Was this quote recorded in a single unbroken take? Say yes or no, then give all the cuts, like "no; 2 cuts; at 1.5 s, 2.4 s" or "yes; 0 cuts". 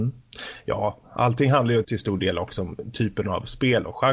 no; 1 cut; at 1.8 s